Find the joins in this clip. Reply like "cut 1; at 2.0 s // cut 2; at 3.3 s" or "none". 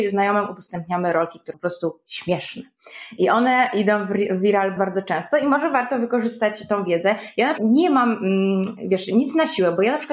cut 1; at 1.5 s // cut 2; at 4.8 s // cut 3; at 7.6 s